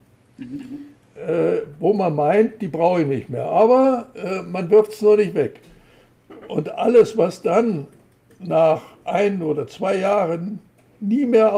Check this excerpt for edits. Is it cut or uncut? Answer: uncut